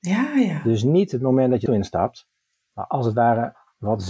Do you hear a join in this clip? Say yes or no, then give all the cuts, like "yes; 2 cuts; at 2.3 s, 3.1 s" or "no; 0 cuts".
yes; 2 cuts; at 1.7 s, 2.4 s